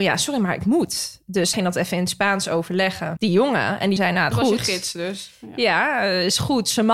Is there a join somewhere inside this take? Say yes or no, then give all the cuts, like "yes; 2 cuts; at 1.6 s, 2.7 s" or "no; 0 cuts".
yes; 4 cuts; at 1.5 s, 3.2 s, 4.0 s, 4.3 s